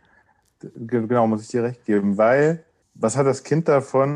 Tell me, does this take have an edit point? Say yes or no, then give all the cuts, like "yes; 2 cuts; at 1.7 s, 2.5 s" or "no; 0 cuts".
yes; 1 cut; at 2.8 s